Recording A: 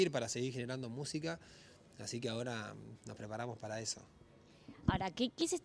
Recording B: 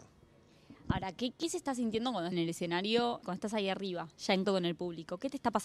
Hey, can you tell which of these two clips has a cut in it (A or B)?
B